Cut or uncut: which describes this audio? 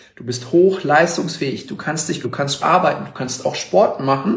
cut